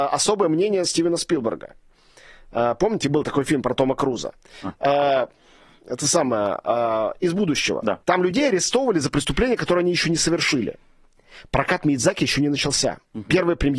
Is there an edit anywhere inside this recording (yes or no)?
yes